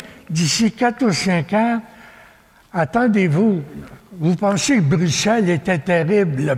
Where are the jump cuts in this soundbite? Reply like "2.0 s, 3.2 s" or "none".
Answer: none